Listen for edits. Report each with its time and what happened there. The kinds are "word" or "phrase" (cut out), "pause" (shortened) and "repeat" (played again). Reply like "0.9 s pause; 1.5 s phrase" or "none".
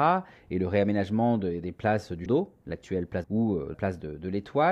2.3 s word; 3.2 s phrase; 3.7 s word